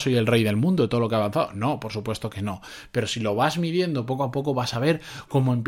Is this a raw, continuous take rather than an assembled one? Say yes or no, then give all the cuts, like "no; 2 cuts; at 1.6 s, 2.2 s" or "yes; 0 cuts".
yes; 0 cuts